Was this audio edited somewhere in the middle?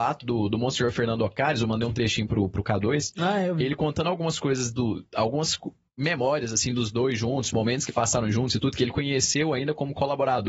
no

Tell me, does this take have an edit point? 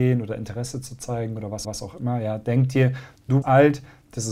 yes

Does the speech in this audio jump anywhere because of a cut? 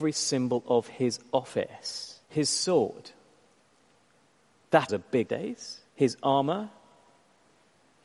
yes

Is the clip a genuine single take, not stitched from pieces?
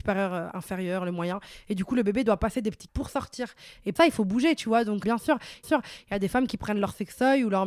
no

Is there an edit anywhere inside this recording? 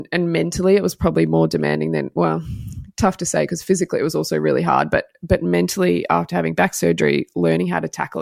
no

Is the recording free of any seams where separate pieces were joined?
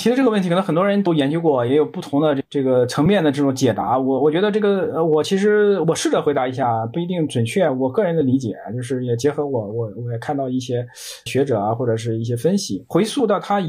no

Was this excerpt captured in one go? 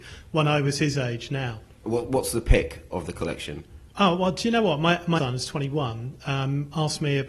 no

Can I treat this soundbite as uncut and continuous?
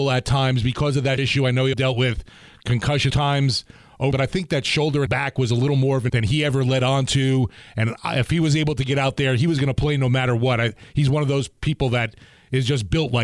no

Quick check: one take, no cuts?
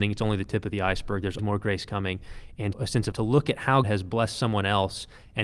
no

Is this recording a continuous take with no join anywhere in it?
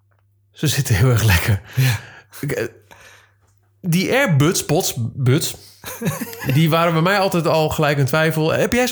yes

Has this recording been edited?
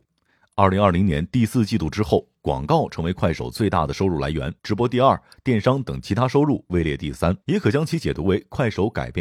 yes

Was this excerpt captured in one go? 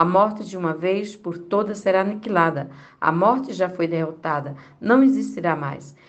yes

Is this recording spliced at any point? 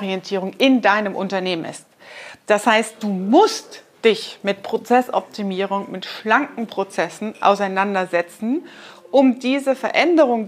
no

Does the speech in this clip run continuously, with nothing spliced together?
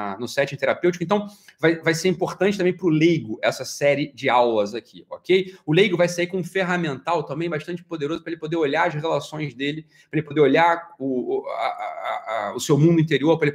yes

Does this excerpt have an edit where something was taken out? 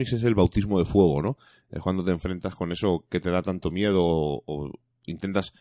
no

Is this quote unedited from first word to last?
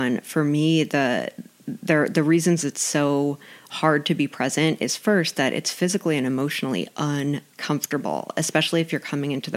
yes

